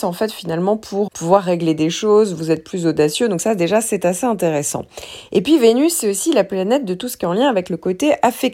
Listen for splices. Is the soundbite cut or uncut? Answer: cut